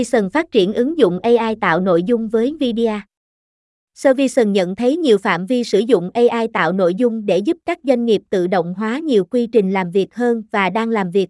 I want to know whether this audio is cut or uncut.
uncut